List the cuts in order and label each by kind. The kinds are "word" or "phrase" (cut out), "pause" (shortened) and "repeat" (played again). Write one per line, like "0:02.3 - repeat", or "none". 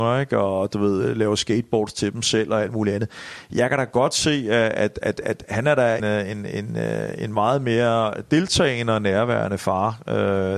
0:06.0 - word